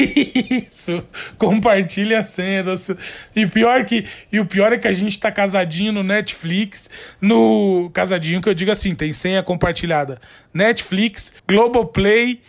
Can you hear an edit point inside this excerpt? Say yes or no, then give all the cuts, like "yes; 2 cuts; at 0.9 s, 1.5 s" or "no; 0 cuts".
yes; 1 cut; at 11.4 s